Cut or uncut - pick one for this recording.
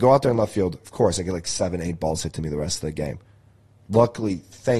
uncut